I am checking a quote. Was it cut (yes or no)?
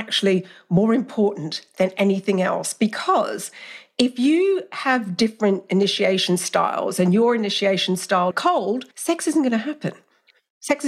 yes